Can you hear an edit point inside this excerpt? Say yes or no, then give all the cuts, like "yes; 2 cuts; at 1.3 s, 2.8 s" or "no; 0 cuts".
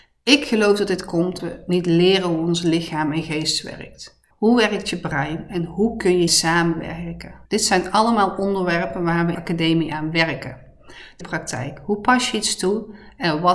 yes; 6 cuts; at 1.4 s, 4.3 s, 6.3 s, 7.5 s, 9.3 s, 11.2 s